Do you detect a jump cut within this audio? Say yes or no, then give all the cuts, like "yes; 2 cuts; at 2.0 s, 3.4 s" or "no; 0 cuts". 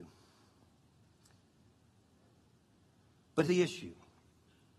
yes; 1 cut; at 3.5 s